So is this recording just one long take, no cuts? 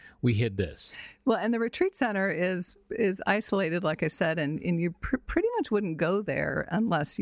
yes; 0 cuts

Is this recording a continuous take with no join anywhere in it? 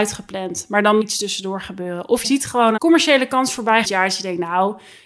no; 4 cuts; at 1.0 s, 2.2 s, 2.8 s, 3.8 s

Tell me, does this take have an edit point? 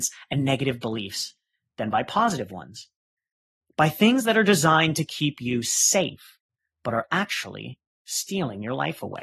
no; 0 cuts

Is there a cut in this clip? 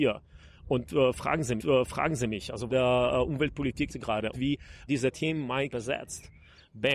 yes; 6 cuts; at 1.6 s, 2.7 s, 3.9 s, 4.3 s, 4.9 s, 5.7 s

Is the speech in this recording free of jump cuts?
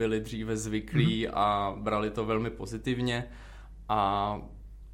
yes; 0 cuts

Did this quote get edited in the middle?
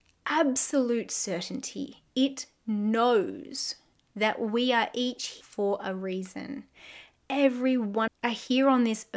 yes; 3 cuts; at 3.9 s, 5.4 s, 8.1 s

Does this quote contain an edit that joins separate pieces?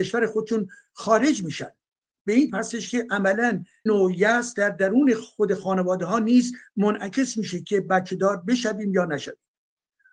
yes; 2 cuts; at 2.5 s, 3.9 s

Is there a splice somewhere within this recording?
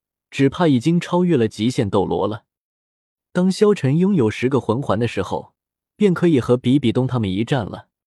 no; 0 cuts

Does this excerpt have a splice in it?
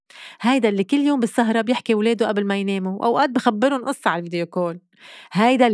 no; 0 cuts

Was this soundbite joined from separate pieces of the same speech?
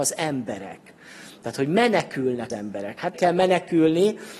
yes; 2 cuts; at 2.5 s, 3.1 s

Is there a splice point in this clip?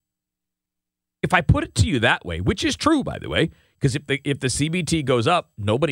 no; 0 cuts

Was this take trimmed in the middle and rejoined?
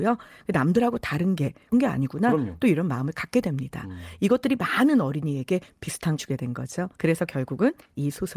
yes; 3 cuts; at 1.7 s, 6.2 s, 6.9 s

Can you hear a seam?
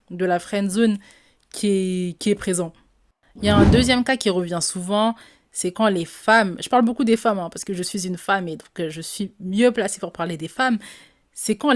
no; 0 cuts

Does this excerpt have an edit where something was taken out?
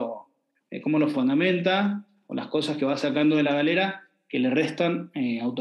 no; 0 cuts

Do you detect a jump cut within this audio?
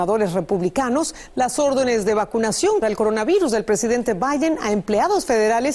yes; 1 cut; at 2.8 s

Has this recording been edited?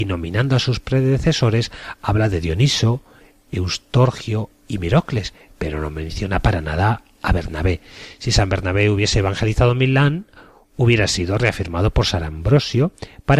no; 0 cuts

